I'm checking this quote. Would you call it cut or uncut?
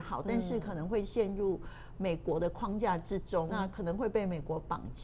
cut